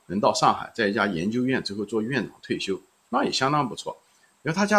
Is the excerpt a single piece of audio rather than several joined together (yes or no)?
yes